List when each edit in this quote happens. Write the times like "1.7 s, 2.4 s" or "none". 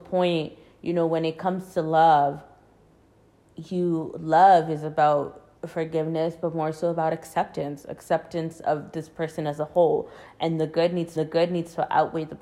5.6 s, 11.2 s

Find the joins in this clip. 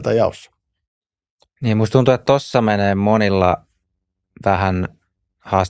none

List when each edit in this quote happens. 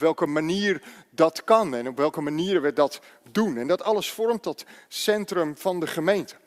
none

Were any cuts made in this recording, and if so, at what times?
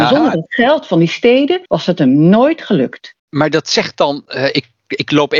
1.7 s, 3.2 s

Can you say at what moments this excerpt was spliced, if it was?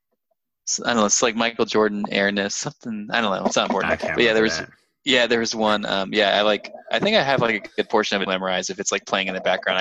8.3 s

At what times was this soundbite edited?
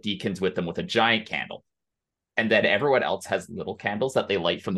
none

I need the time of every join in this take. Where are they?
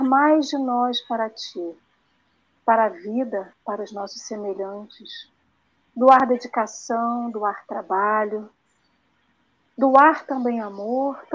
none

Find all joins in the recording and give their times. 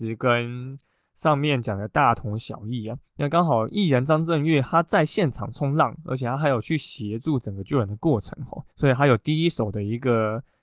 3.1 s, 8.7 s

